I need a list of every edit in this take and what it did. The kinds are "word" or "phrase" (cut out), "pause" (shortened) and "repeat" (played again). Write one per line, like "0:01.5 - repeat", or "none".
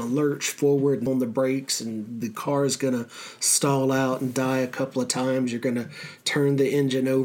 0:01.1 - word